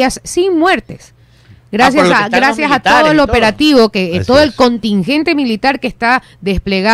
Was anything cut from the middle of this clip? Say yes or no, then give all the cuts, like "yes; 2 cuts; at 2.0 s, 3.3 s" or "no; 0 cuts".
no; 0 cuts